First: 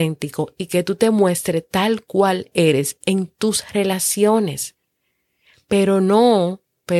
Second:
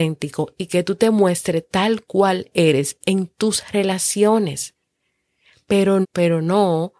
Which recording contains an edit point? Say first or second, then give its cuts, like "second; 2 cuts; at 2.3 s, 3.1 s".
second; 1 cut; at 6.0 s